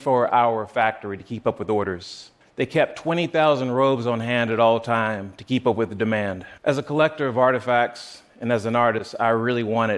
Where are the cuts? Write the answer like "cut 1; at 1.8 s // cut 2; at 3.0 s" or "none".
cut 1; at 2.4 s // cut 2; at 6.6 s

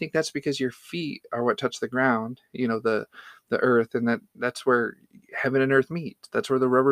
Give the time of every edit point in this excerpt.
none

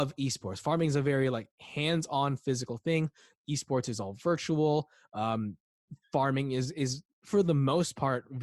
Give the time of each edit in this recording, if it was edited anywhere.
none

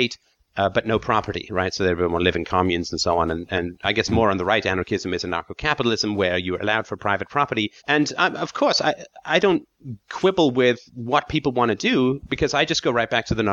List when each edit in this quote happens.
cut 1; at 7.8 s // cut 2; at 10.9 s

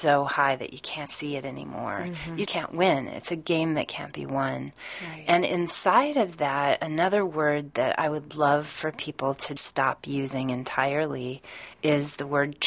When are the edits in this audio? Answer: cut 1; at 1.1 s // cut 2; at 2.5 s // cut 3; at 9.6 s // cut 4; at 11.7 s

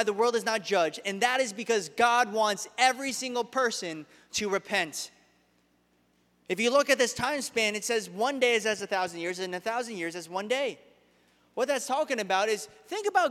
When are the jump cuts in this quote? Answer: none

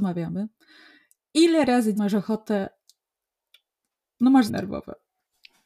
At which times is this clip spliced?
cut 1; at 2.0 s // cut 2; at 4.5 s

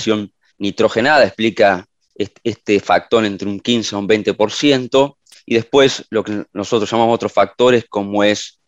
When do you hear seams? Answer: none

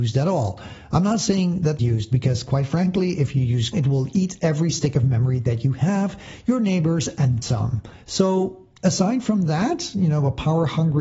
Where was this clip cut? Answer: cut 1; at 1.8 s // cut 2; at 3.7 s // cut 3; at 7.4 s // cut 4; at 8.8 s

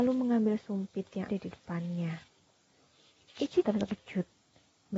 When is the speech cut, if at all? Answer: cut 1; at 1.3 s // cut 2; at 3.6 s

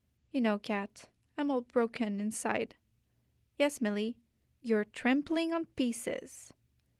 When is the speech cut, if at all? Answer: none

